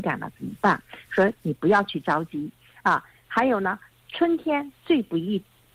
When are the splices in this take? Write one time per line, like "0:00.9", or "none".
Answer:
0:03.9